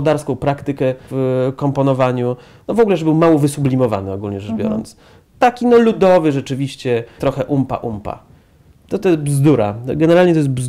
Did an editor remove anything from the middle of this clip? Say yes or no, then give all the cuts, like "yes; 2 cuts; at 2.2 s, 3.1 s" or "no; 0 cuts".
yes; 3 cuts; at 1.1 s, 7.2 s, 9.0 s